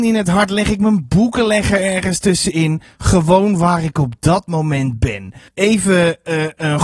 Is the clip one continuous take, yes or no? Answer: no